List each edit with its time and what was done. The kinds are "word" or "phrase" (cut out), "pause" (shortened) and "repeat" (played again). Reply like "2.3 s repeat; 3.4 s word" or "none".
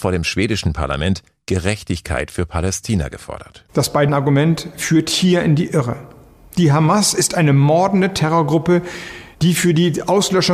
4.1 s word